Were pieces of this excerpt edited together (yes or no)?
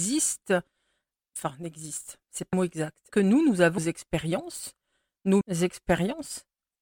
yes